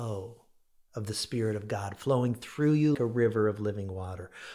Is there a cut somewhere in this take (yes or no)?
yes